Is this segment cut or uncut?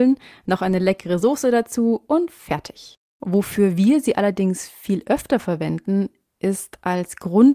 uncut